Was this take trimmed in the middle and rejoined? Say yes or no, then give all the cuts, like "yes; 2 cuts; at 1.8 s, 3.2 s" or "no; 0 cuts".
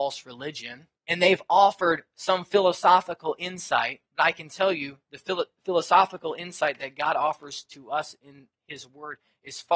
yes; 2 cuts; at 1.0 s, 4.1 s